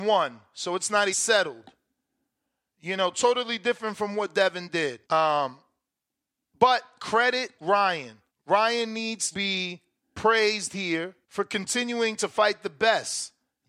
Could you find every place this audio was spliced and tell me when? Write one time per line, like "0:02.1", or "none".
0:01.1
0:05.0
0:07.6
0:08.3
0:09.3
0:10.0
0:11.2